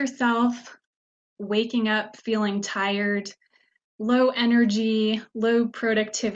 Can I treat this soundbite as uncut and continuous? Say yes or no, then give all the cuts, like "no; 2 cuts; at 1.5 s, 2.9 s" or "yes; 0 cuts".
yes; 0 cuts